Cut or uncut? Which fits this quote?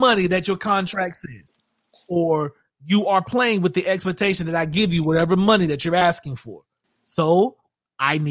uncut